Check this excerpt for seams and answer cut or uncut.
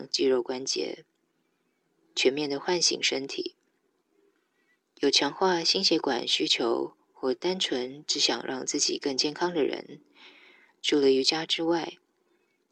uncut